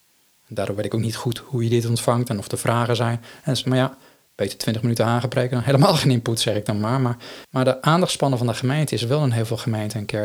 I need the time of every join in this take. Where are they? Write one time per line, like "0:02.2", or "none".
0:03.6